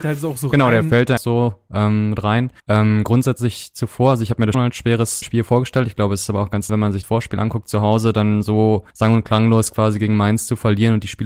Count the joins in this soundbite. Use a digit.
7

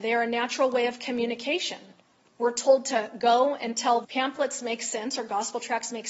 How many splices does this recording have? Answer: 1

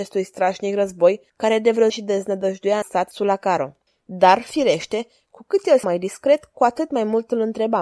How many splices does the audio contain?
5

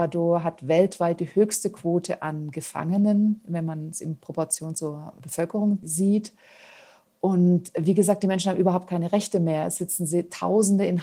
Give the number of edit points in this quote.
0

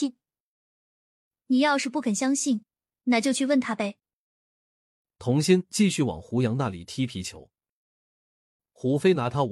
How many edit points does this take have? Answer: 0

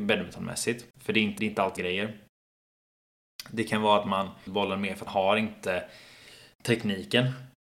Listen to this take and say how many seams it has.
5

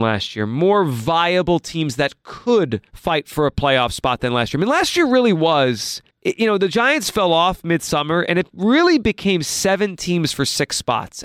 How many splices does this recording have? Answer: 2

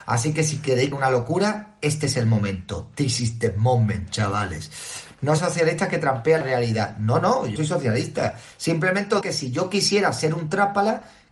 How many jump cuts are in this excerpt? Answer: 5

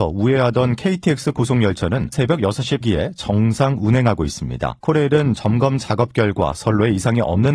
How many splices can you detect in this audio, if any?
3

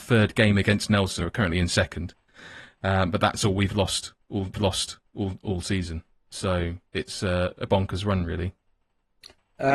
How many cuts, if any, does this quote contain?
4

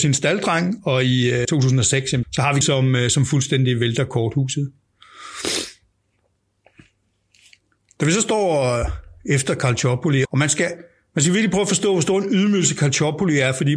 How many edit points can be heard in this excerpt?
4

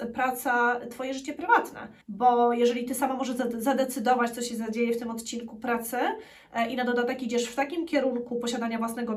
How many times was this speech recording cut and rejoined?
1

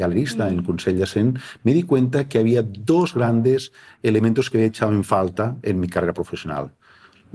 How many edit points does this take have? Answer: 0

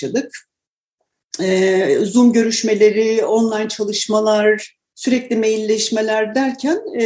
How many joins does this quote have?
0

